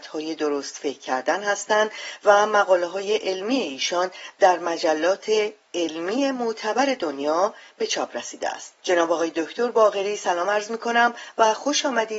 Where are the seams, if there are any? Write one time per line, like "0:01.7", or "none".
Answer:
0:08.8